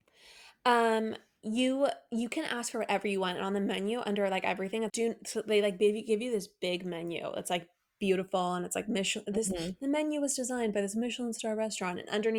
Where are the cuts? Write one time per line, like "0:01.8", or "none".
0:04.9